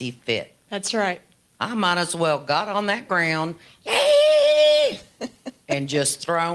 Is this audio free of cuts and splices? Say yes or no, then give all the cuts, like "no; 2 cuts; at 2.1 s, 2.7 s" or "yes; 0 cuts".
yes; 0 cuts